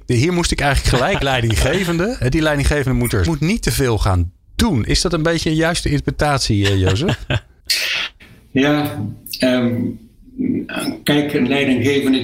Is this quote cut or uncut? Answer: cut